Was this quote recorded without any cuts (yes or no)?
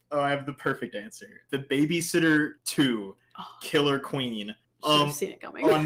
no